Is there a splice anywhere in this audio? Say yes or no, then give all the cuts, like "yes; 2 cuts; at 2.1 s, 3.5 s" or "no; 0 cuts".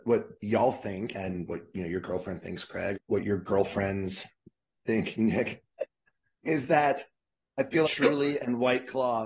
yes; 4 cuts; at 1.1 s, 2.9 s, 6.4 s, 7.8 s